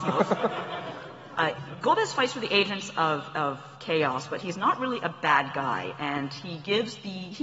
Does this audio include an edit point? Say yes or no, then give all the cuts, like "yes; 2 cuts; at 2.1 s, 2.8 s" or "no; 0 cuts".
no; 0 cuts